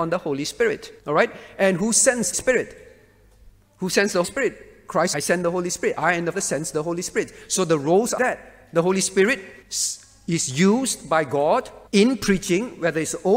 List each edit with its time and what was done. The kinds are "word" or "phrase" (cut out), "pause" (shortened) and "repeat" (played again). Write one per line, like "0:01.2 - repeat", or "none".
0:01.0 - pause
0:02.3 - phrase
0:04.2 - word
0:05.1 - phrase
0:06.3 - word
0:08.2 - word
0:09.6 - pause
0:11.9 - pause